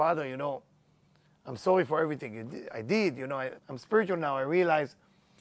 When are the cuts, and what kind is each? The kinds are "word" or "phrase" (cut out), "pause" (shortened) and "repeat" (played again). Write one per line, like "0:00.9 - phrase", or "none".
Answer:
0:03.6 - pause

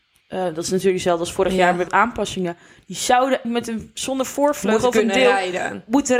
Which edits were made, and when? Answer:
0:01.9 - word
0:03.4 - word

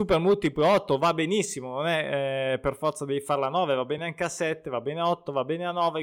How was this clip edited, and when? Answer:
none

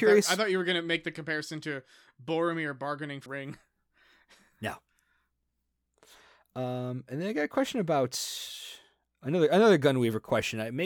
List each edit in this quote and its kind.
0:03.3 - word

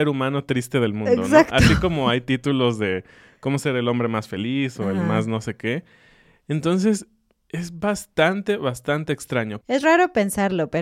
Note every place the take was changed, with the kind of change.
none

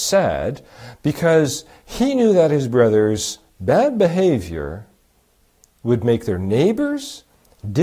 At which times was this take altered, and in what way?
none

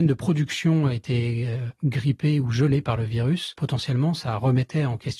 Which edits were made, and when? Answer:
none

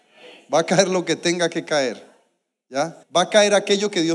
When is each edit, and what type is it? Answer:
0:03.0 - pause

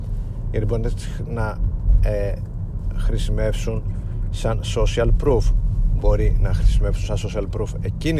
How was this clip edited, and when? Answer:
none

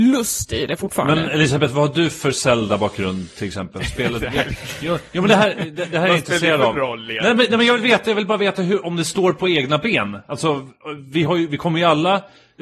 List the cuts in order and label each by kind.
none

